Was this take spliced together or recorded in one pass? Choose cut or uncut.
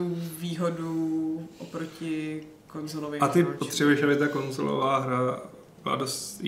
uncut